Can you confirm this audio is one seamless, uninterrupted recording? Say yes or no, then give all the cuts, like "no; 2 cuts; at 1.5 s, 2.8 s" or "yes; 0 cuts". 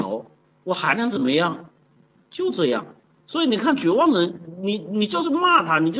yes; 0 cuts